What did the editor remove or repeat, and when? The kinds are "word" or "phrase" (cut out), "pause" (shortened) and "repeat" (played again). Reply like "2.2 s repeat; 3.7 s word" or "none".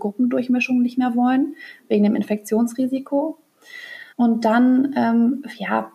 4.1 s pause